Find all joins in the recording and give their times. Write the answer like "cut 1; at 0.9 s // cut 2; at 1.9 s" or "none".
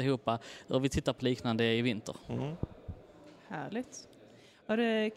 cut 1; at 1.2 s